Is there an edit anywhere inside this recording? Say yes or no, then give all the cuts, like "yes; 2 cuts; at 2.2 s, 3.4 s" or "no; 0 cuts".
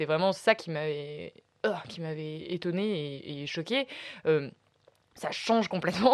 no; 0 cuts